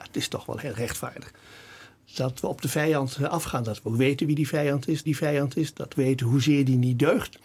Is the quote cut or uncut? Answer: cut